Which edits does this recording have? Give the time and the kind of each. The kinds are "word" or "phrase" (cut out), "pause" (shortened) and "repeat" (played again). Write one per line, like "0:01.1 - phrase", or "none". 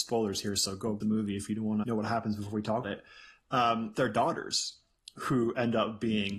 0:01.0 - word
0:01.8 - word
0:02.8 - word
0:03.9 - word